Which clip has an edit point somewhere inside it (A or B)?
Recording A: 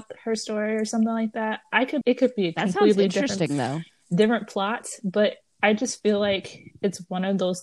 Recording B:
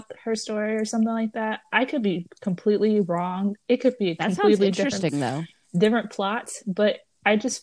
A